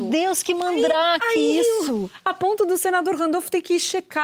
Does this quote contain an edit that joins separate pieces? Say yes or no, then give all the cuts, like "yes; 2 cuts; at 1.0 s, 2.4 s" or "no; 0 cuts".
no; 0 cuts